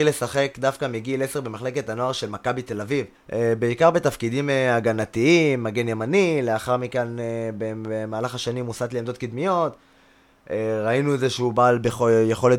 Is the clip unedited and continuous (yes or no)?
no